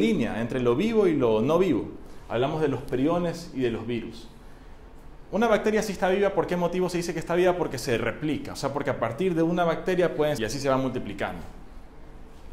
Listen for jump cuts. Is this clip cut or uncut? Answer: cut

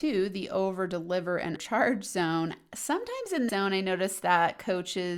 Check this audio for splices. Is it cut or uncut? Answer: cut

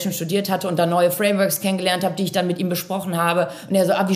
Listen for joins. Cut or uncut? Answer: uncut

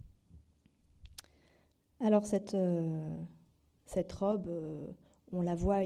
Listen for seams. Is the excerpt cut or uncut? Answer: uncut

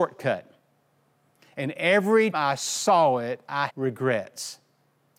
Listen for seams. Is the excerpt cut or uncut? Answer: cut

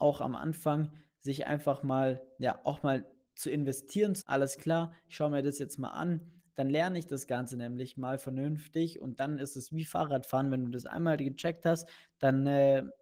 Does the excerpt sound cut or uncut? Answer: cut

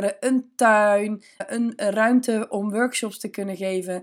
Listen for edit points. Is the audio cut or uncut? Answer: uncut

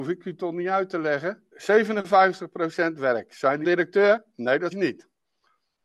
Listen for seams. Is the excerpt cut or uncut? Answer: cut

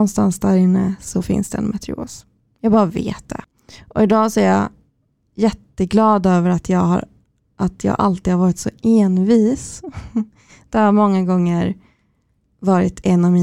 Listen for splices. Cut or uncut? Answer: uncut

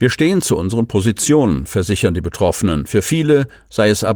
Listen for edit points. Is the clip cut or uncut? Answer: uncut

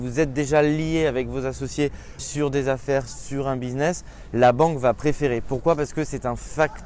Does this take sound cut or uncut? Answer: cut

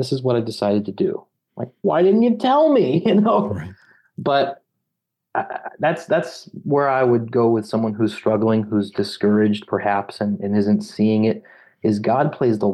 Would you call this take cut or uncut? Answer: cut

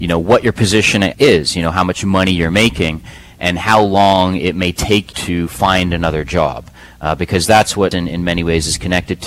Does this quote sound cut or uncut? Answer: cut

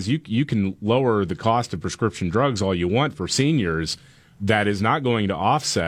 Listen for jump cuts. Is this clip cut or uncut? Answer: uncut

